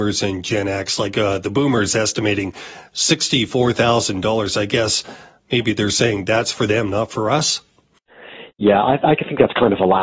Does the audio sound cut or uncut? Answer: uncut